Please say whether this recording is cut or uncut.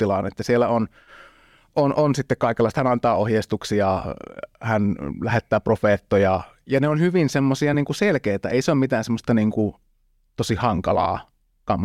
uncut